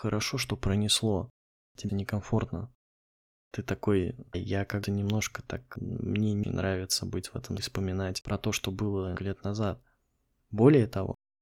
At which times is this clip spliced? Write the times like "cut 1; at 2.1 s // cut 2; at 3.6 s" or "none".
cut 1; at 1.9 s // cut 2; at 4.3 s // cut 3; at 4.8 s // cut 4; at 5.8 s // cut 5; at 6.4 s // cut 6; at 7.6 s // cut 7; at 9.2 s